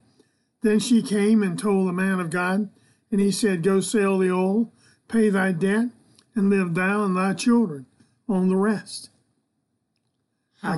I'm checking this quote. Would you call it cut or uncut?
uncut